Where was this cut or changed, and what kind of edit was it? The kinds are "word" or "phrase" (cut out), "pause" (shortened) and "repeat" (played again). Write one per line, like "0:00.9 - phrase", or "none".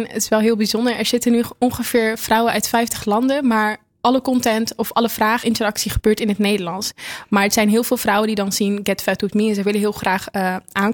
0:05.4 - phrase